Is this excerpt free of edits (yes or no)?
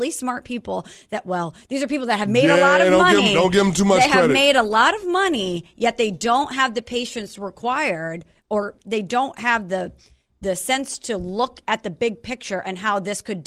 yes